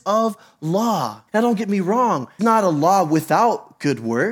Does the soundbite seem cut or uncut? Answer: cut